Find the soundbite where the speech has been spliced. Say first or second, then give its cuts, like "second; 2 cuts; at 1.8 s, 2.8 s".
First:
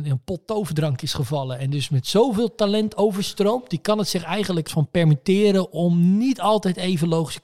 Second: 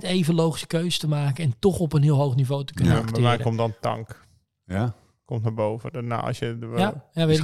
first; 1 cut; at 4.7 s